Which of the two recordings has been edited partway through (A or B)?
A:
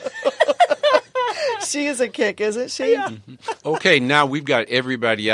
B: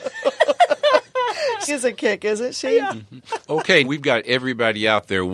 B